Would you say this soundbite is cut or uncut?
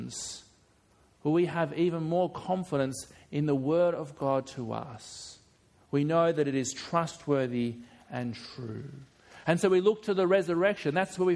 uncut